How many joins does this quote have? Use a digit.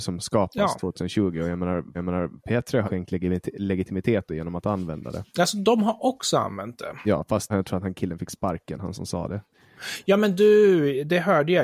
5